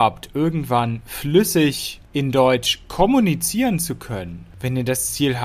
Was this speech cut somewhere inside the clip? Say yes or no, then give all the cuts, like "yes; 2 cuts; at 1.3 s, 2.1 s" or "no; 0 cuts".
no; 0 cuts